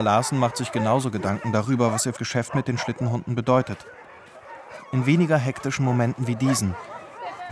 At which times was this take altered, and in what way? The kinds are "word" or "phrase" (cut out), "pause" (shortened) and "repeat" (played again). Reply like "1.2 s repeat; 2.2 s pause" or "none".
2.2 s word